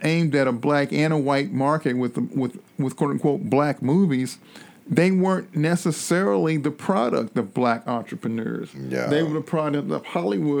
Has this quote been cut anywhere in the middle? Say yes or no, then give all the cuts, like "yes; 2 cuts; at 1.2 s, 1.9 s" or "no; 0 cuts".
yes; 1 cut; at 2.7 s